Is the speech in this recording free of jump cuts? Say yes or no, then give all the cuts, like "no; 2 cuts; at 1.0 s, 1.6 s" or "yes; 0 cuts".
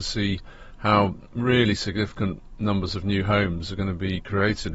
yes; 0 cuts